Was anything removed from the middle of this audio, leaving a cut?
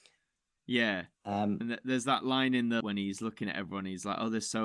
yes; 2 cuts; at 1.1 s, 2.8 s

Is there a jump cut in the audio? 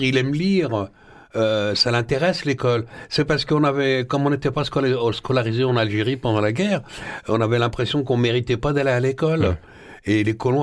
no; 0 cuts

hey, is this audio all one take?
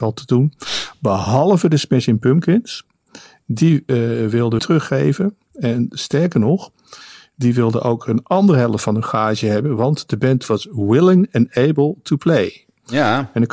no; 1 cut; at 4.6 s

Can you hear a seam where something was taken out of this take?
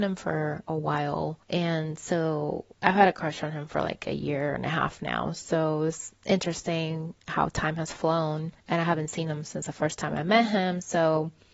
yes; 4 cuts; at 1.4 s, 2.7 s, 6.2 s, 8.6 s

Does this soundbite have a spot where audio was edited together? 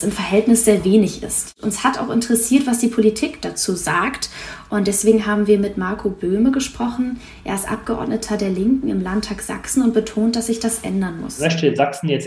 no; 0 cuts

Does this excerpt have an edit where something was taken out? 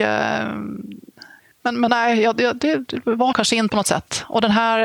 yes; 4 cuts; at 1.4 s, 1.9 s, 3.3 s, 3.7 s

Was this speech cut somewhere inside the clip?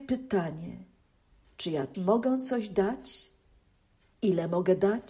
yes; 1 cut; at 1.9 s

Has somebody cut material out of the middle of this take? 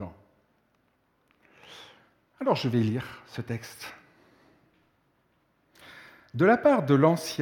no; 0 cuts

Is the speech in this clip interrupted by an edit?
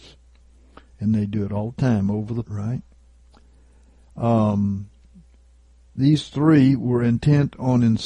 yes; 1 cut; at 2.4 s

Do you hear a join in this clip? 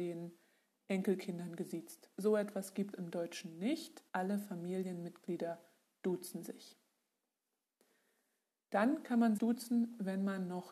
yes; 4 cuts; at 2.1 s, 2.9 s, 4.1 s, 9.4 s

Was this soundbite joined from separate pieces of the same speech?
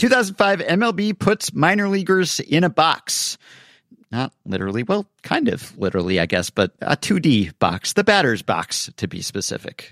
no; 0 cuts

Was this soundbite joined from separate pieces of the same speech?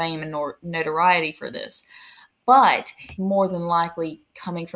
yes; 1 cut; at 3.2 s

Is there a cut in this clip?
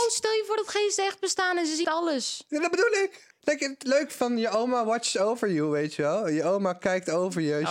yes; 1 cut; at 1.8 s

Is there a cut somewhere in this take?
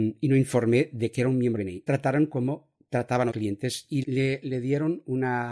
yes; 4 cuts; at 1.6 s, 1.9 s, 3.3 s, 4.0 s

